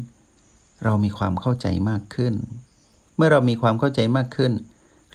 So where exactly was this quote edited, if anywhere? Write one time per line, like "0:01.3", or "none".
none

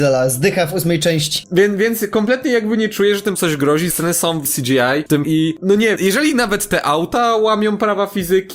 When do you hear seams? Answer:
0:03.3
0:03.9
0:04.4
0:05.2
0:05.6
0:06.0

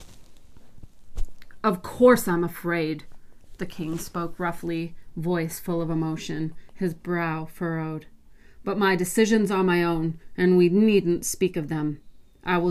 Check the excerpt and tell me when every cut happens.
none

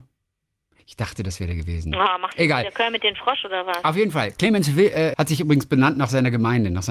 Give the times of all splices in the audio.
0:05.1

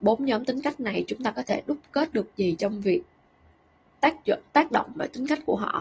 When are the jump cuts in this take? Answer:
none

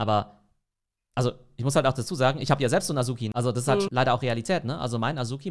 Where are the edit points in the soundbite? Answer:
0:03.8

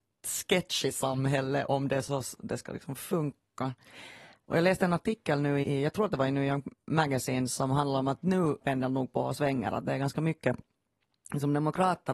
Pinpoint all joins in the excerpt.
0:01.7
0:05.6
0:08.6

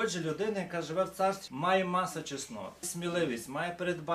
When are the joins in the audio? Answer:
0:01.5
0:02.8

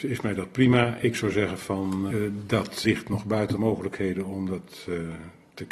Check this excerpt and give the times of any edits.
0:02.1
0:02.8
0:03.6

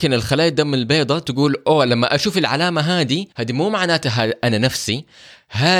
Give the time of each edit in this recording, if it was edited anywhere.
0:03.3

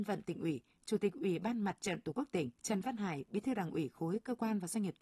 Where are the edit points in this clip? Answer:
0:02.5

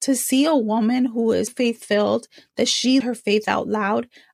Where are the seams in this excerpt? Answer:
0:01.5
0:03.0

